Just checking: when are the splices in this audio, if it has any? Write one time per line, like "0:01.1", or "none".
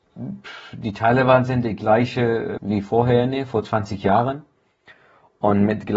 0:02.6